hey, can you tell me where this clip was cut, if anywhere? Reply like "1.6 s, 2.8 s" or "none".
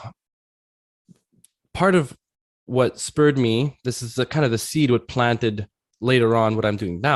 none